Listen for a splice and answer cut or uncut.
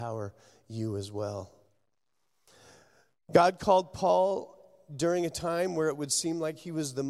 uncut